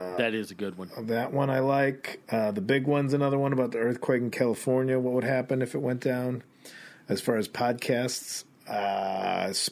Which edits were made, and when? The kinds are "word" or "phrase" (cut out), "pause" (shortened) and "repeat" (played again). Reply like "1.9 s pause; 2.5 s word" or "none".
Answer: none